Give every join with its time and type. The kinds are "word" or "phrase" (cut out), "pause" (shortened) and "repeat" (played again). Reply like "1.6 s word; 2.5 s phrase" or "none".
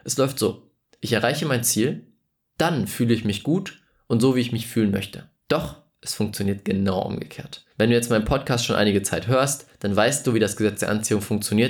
5.4 s pause; 7.7 s pause